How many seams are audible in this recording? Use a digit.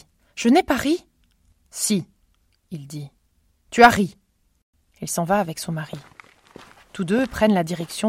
0